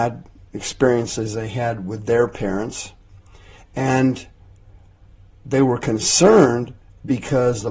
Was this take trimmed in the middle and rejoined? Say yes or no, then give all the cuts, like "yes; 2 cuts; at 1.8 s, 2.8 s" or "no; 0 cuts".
no; 0 cuts